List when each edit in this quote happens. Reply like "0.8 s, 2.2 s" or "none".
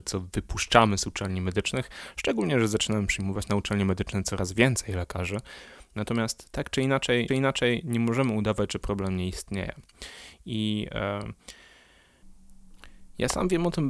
7.3 s